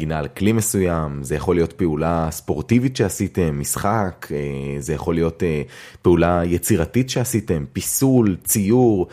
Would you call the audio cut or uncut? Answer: uncut